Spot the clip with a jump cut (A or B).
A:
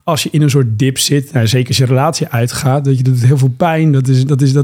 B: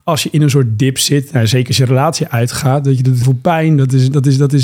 B